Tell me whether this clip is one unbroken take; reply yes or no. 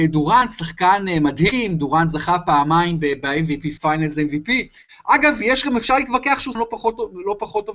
no